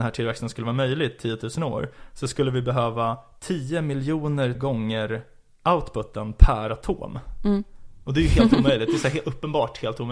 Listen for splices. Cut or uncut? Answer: cut